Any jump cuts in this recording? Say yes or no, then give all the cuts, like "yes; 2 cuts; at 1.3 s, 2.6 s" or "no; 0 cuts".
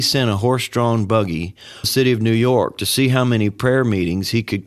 yes; 1 cut; at 1.8 s